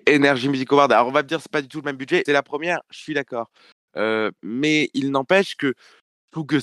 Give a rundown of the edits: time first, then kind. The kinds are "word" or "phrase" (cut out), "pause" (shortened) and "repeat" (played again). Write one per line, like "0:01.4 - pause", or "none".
0:02.2 - phrase